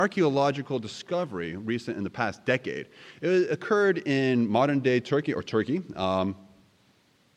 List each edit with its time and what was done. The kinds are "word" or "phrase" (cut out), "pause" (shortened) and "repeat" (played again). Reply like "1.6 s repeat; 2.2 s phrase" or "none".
none